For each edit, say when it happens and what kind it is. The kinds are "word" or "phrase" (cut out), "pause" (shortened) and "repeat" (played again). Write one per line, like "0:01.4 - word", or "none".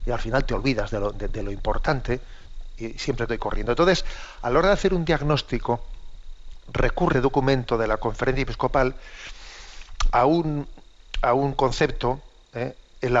0:03.3 - word
0:07.1 - word